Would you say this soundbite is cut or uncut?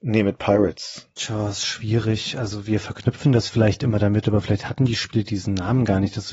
uncut